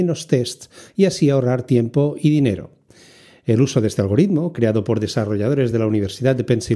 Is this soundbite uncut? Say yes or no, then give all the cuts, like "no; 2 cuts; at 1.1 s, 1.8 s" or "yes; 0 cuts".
yes; 0 cuts